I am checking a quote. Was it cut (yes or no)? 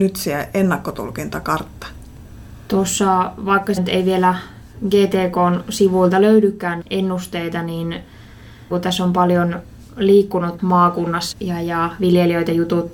yes